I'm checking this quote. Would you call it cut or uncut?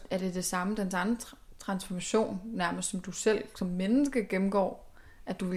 uncut